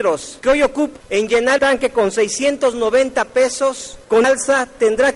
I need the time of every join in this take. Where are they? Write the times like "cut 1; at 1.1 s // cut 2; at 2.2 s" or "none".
cut 1; at 1.0 s // cut 2; at 1.6 s // cut 3; at 4.2 s

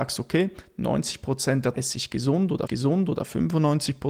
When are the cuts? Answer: cut 1; at 1.7 s // cut 2; at 2.7 s

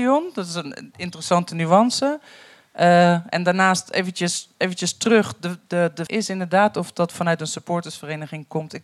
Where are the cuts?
cut 1; at 6.1 s

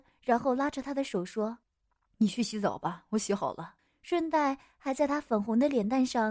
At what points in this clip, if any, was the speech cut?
cut 1; at 1.6 s // cut 2; at 3.8 s

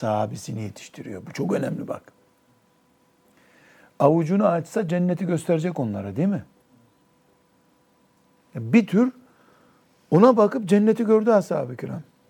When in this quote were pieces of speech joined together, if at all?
none

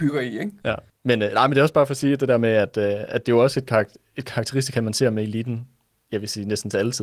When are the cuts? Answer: none

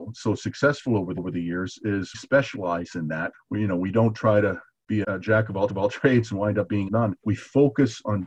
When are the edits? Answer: cut 1; at 1.2 s // cut 2; at 2.1 s // cut 3; at 3.3 s // cut 4; at 5.0 s // cut 5; at 5.7 s // cut 6; at 6.9 s // cut 7; at 7.2 s

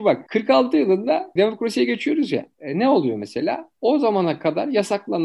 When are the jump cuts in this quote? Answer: cut 1; at 1.4 s // cut 2; at 2.5 s

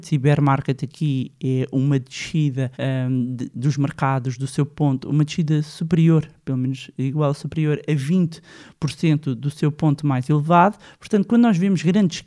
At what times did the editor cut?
cut 1; at 2.7 s

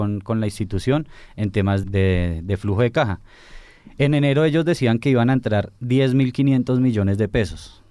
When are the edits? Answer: cut 1; at 1.8 s

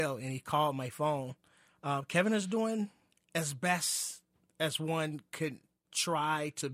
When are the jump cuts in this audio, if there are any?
none

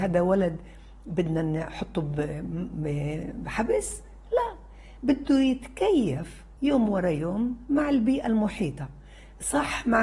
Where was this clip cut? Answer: cut 1; at 6.6 s

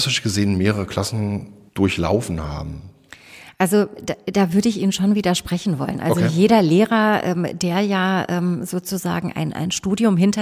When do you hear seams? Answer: cut 1; at 1.7 s

